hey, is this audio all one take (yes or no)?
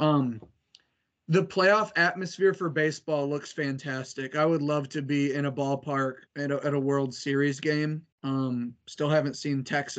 no